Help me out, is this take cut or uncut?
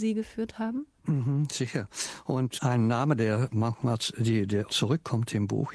cut